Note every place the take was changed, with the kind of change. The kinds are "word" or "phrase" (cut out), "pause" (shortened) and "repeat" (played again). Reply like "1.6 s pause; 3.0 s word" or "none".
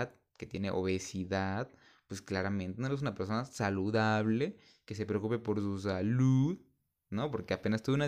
none